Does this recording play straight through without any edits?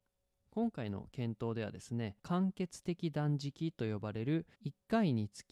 no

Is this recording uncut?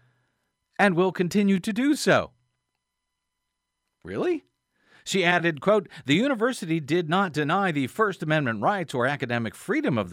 yes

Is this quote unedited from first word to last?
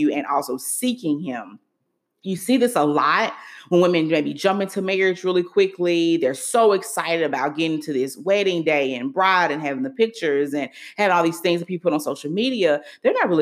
yes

